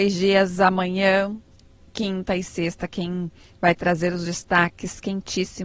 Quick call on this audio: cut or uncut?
uncut